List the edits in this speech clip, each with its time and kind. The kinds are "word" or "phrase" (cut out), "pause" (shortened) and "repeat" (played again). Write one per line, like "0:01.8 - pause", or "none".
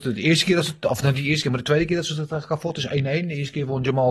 none